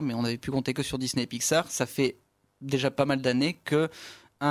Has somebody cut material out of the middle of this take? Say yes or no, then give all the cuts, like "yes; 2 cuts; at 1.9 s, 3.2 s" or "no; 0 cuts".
no; 0 cuts